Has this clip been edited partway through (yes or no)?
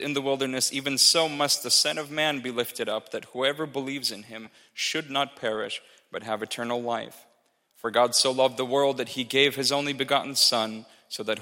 no